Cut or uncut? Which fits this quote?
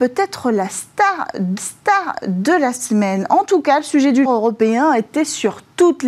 cut